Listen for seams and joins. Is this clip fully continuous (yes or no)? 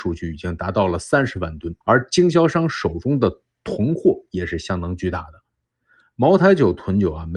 no